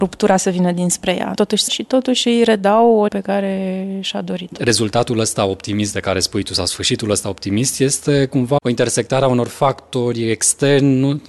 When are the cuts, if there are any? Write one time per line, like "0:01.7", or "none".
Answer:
0:01.3
0:01.7
0:03.1
0:08.6